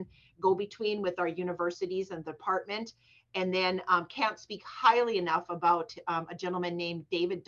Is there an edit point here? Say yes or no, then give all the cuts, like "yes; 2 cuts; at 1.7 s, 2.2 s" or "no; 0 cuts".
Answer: no; 0 cuts